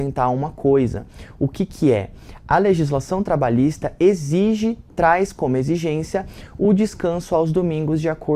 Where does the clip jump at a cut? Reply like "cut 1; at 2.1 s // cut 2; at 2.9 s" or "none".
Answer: none